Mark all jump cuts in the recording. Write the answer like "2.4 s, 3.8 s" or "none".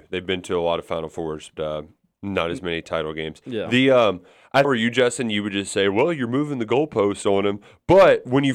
1.6 s, 4.6 s